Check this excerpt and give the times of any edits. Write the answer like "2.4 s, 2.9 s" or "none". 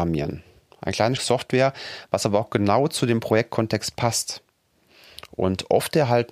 1.2 s